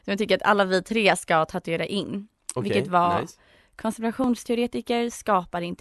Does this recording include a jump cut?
no; 0 cuts

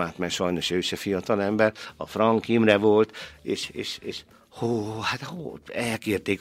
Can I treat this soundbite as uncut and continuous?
yes; 0 cuts

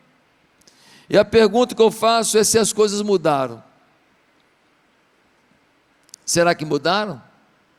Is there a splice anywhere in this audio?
no; 0 cuts

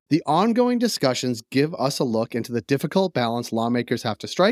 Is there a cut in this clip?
no; 0 cuts

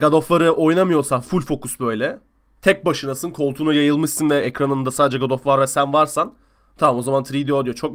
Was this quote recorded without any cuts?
yes; 0 cuts

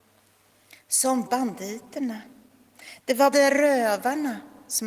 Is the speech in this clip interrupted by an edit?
yes; 2 cuts; at 1.3 s, 3.3 s

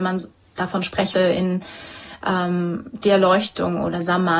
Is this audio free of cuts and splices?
no; 1 cut; at 1.1 s

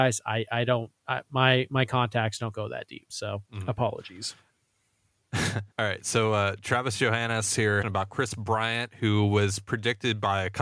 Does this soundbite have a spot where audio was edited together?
yes; 3 cuts; at 3.5 s, 5.7 s, 7.8 s

